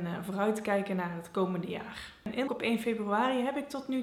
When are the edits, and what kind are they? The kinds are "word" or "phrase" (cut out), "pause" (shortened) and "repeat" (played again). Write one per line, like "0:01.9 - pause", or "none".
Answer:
0:02.5 - word